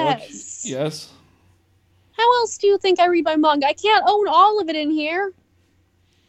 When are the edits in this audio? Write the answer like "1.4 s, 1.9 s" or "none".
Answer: none